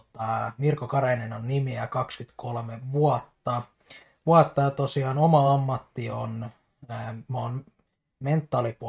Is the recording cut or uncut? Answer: uncut